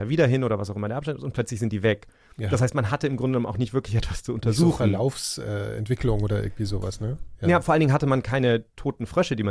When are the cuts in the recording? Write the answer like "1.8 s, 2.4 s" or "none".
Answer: none